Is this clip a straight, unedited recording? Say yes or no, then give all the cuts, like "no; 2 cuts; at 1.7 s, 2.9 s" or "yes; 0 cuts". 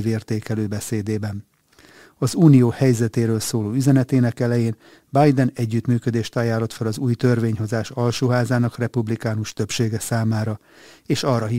yes; 0 cuts